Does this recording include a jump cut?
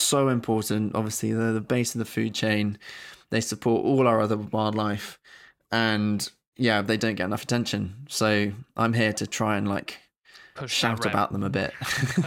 no; 0 cuts

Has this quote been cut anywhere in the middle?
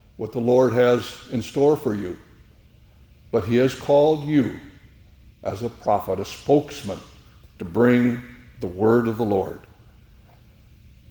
no; 0 cuts

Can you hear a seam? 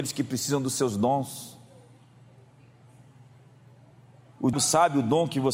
yes; 1 cut; at 4.5 s

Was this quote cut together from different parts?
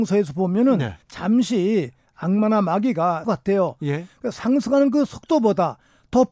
yes; 2 cuts; at 1.0 s, 3.2 s

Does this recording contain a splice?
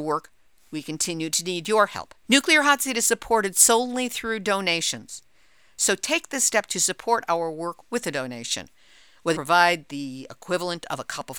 yes; 2 cuts; at 2.2 s, 9.3 s

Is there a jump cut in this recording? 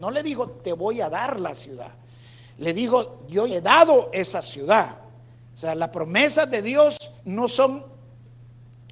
yes; 2 cuts; at 3.5 s, 7.2 s

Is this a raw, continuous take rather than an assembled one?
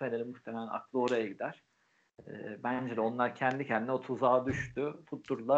yes; 0 cuts

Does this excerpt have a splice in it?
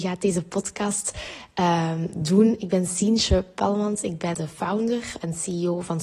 yes; 1 cut; at 4.3 s

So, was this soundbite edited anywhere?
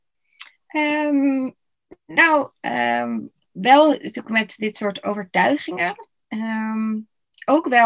no; 0 cuts

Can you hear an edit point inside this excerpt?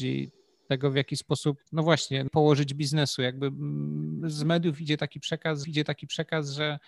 yes; 3 cuts; at 1.7 s, 2.3 s, 5.6 s

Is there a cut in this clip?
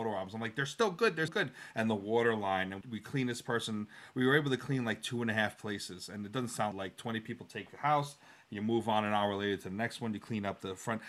yes; 3 cuts; at 1.3 s, 2.8 s, 6.7 s

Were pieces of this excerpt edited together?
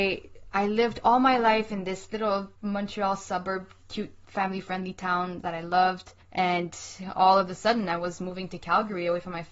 yes; 3 cuts; at 2.6 s, 3.8 s, 6.2 s

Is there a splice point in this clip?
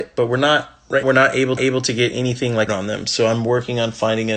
yes; 3 cuts; at 1.0 s, 1.6 s, 2.7 s

